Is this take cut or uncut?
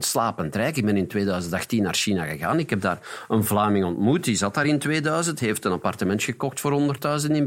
uncut